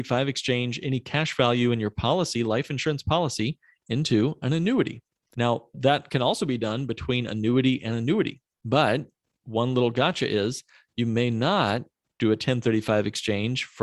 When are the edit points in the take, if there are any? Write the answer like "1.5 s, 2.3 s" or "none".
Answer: none